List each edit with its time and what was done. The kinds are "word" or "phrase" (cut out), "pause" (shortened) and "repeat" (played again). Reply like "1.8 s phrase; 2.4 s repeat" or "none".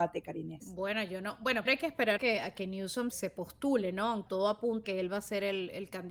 1.7 s word; 2.2 s word; 3.1 s word; 4.3 s word; 4.8 s word